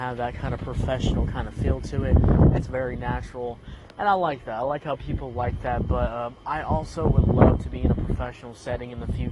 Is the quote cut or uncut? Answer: uncut